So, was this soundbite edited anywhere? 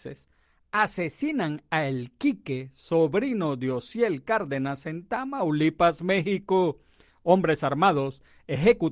no; 0 cuts

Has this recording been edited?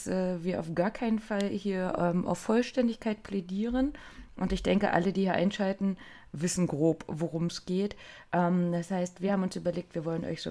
no; 0 cuts

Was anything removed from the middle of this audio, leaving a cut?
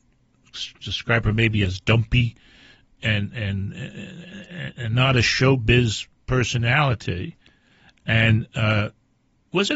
no; 0 cuts

